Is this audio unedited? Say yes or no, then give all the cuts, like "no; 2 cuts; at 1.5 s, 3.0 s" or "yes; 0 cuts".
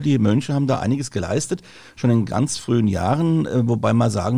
yes; 0 cuts